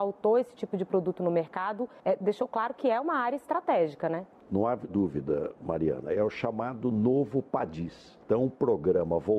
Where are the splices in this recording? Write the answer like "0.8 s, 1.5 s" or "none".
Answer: 4.9 s, 8.2 s